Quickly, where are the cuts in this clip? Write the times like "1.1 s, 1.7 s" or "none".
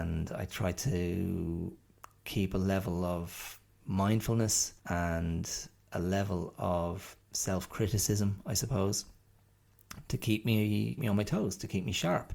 1.9 s, 4.8 s, 7.2 s, 11.0 s